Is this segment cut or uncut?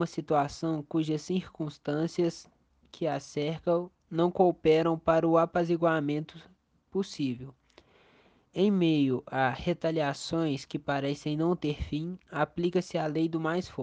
uncut